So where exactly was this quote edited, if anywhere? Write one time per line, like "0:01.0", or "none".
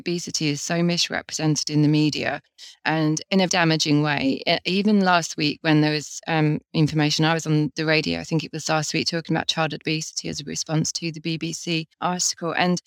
0:03.5
0:11.9